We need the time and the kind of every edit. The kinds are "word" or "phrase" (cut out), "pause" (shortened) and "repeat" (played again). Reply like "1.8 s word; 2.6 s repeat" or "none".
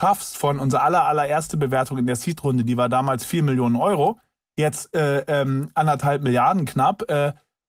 none